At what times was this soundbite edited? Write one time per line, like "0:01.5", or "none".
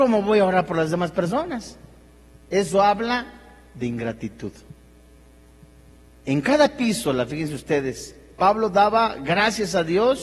none